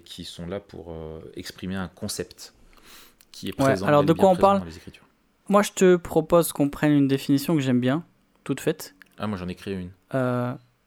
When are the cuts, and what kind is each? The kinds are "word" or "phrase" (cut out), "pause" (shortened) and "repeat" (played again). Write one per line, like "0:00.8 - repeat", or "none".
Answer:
0:05.5 - word

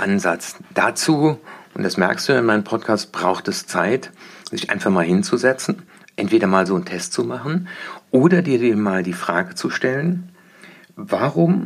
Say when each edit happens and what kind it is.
none

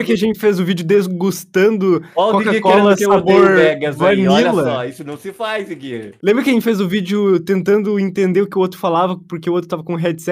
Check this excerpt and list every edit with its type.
0:06.2 - pause

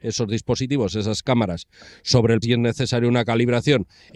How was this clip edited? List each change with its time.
0:02.4 - word

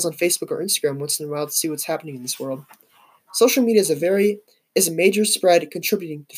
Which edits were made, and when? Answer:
none

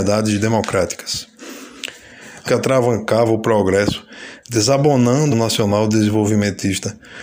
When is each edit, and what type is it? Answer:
0:02.5 - phrase
0:05.3 - phrase

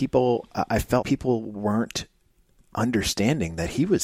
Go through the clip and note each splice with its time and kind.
0:01.0 - word

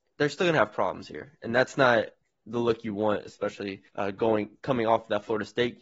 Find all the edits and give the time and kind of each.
0:02.2 - pause
0:03.9 - pause

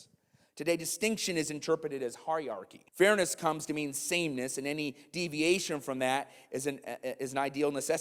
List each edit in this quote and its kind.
0:02.9 - pause

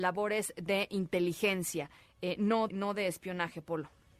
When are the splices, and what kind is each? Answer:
0:02.7 - word

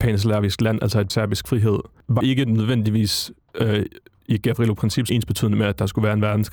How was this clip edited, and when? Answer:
0:01.1 - phrase
0:02.2 - word
0:05.1 - word

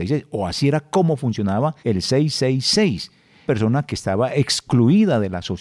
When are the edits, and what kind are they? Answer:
0:01.8 - pause
0:03.5 - phrase

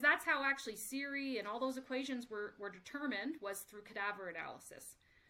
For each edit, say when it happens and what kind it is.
none

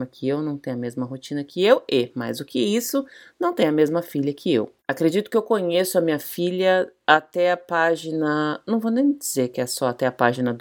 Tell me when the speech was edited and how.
0:04.8 - pause

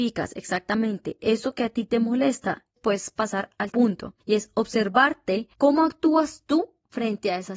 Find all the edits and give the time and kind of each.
0:02.8 - word
0:03.7 - word
0:04.2 - pause
0:05.5 - pause

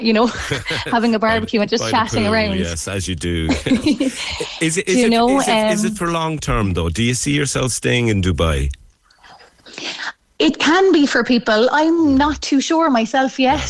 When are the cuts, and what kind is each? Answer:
none

